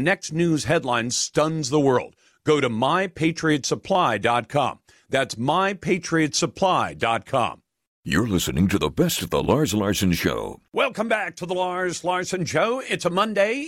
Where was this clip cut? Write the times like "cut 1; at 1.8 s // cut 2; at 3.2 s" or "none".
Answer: none